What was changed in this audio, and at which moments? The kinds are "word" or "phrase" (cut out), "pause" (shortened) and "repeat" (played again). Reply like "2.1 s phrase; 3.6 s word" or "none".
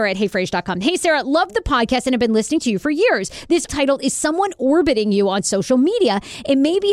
3.7 s word